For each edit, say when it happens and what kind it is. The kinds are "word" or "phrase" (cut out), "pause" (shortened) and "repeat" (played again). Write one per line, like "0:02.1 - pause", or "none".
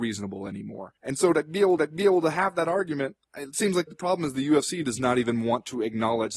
0:01.0 - pause
0:01.8 - repeat
0:03.3 - pause
0:03.9 - word